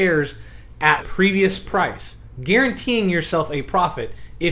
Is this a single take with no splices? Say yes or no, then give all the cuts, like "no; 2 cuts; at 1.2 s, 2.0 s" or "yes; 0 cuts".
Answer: no; 1 cut; at 1.0 s